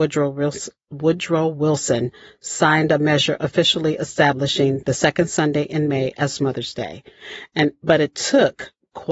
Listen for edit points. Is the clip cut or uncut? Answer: uncut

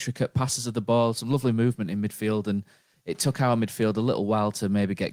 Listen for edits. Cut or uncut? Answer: uncut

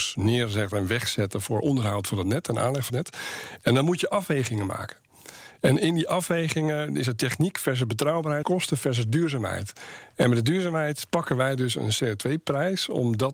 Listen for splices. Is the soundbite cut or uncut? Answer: cut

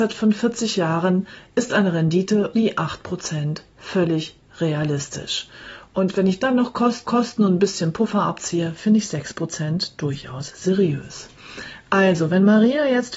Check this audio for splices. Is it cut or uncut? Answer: cut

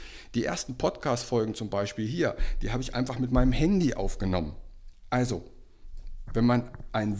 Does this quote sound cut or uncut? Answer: uncut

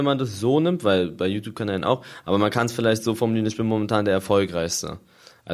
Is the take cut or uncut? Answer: uncut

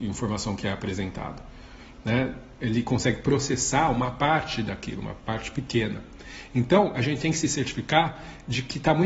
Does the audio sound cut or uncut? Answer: uncut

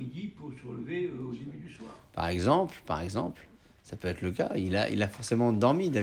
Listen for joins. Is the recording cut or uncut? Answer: uncut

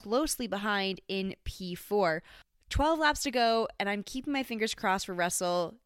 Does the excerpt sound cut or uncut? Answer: uncut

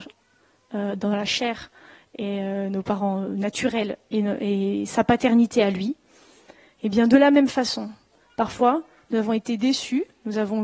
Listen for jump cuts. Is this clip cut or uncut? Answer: uncut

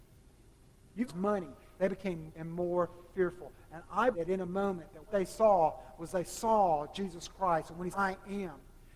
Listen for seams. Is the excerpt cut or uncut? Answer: cut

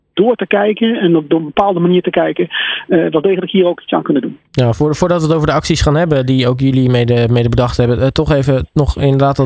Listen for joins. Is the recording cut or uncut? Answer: cut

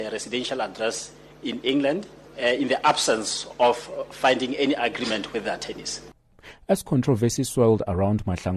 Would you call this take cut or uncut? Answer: uncut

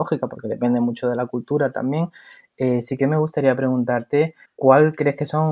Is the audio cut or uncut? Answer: cut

